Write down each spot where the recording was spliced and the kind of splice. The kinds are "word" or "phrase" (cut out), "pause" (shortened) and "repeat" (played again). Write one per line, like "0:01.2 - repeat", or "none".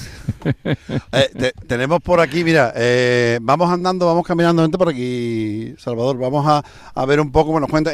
none

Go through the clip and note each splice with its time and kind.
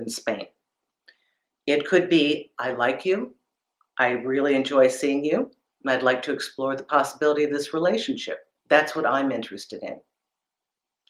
none

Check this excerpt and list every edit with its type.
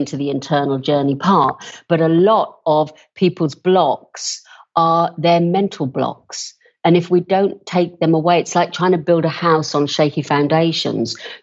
none

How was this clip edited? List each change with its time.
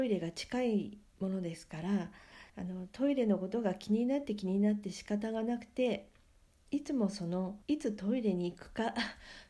0:01.1 - pause
0:02.5 - pause
0:07.6 - pause

